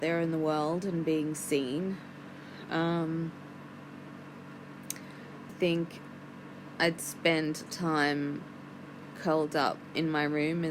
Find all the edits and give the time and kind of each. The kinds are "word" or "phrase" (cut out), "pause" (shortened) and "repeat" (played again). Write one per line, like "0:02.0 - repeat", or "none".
0:05.5 - word
0:07.7 - word